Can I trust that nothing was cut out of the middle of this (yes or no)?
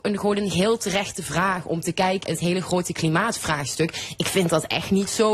no